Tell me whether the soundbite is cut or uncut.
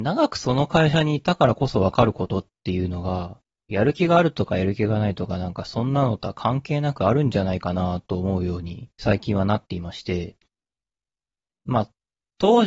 cut